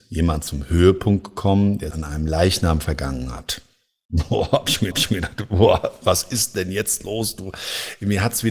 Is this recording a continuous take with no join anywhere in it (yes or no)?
no